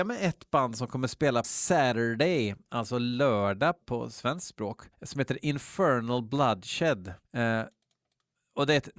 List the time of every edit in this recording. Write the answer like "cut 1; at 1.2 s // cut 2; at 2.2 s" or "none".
cut 1; at 1.4 s // cut 2; at 3.8 s // cut 3; at 4.9 s // cut 4; at 7.2 s